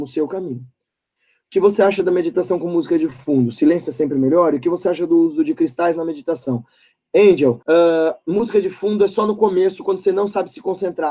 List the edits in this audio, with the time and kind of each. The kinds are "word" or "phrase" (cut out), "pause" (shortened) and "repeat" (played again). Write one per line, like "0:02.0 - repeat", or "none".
0:07.6 - pause